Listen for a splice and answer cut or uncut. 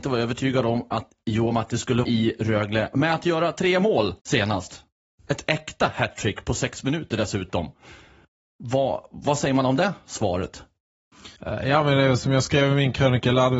cut